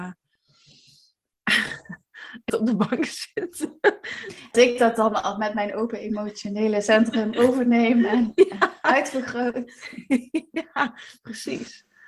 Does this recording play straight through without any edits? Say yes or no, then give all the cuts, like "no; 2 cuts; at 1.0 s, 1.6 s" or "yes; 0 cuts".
no; 2 cuts; at 2.5 s, 4.5 s